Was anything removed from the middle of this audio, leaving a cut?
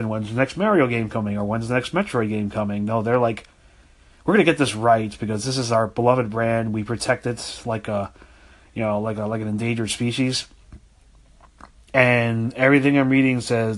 no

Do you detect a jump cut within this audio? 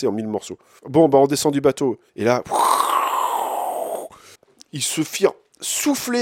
yes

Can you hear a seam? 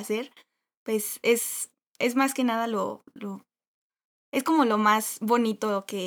no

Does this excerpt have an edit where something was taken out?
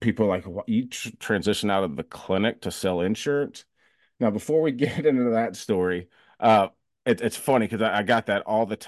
no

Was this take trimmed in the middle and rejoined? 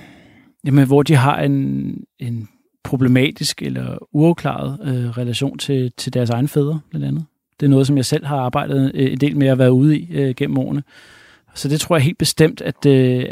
no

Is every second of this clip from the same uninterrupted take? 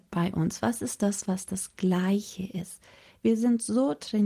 yes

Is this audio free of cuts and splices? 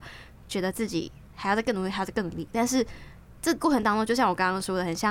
no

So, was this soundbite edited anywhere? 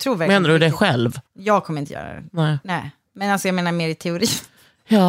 yes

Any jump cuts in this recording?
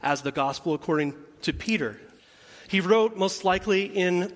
yes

